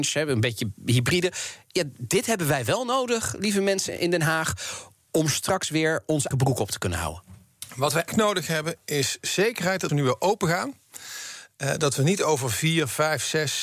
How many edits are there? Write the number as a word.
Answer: three